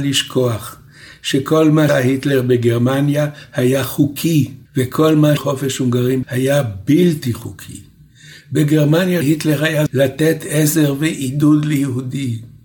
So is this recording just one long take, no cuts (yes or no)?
no